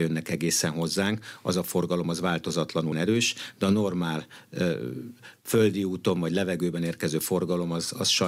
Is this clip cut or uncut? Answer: cut